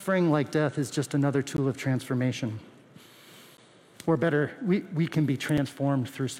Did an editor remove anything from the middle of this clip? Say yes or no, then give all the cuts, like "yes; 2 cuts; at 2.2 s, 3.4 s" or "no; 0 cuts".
no; 0 cuts